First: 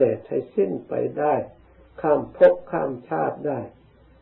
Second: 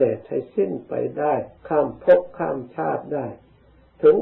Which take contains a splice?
second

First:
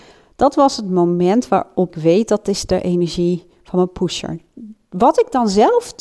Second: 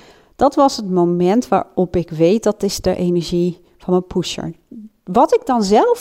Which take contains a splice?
first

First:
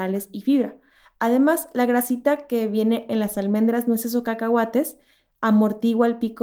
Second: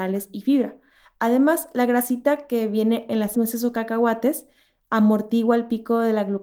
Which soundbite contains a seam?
second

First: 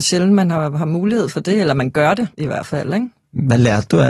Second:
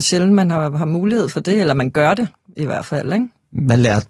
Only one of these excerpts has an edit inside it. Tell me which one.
first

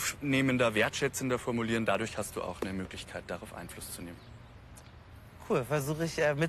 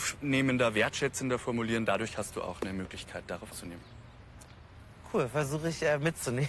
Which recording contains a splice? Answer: second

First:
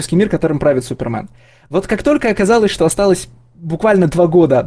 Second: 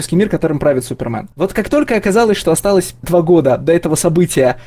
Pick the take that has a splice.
second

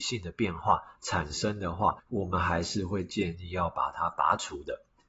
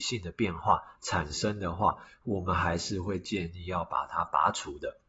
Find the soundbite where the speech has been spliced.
first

